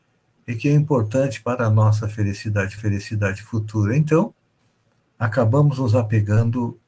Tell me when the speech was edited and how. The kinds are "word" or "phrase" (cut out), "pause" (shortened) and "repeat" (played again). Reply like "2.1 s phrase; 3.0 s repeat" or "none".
2.8 s repeat; 4.6 s pause